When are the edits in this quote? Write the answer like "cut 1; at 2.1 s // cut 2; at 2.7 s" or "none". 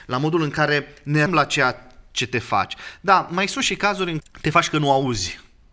cut 1; at 1.3 s // cut 2; at 4.2 s